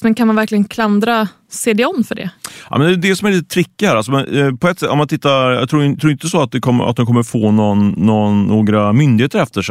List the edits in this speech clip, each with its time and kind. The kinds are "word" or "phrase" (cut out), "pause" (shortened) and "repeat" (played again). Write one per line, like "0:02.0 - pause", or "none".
none